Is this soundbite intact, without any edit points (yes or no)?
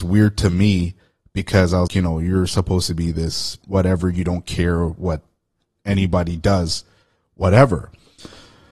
no